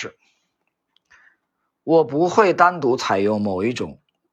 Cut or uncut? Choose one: uncut